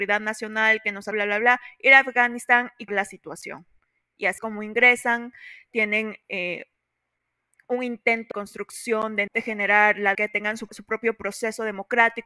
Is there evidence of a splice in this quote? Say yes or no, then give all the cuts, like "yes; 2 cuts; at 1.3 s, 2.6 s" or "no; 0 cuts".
yes; 7 cuts; at 1.1 s, 2.9 s, 4.4 s, 8.3 s, 9.3 s, 10.1 s, 10.7 s